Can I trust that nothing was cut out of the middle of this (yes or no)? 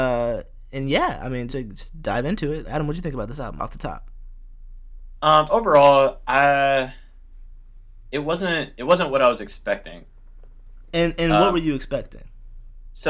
no